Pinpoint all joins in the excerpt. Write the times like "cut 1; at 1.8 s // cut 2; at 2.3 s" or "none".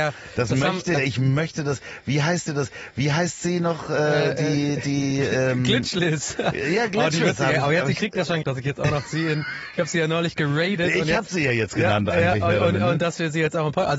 cut 1; at 0.9 s // cut 2; at 2.5 s // cut 3; at 8.4 s